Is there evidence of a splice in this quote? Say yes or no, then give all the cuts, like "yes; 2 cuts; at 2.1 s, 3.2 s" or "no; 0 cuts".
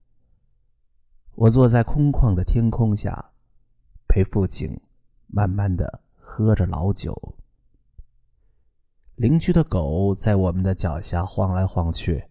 no; 0 cuts